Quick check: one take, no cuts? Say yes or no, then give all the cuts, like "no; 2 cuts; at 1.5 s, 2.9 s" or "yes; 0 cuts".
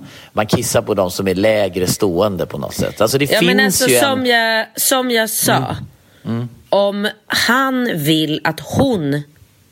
yes; 0 cuts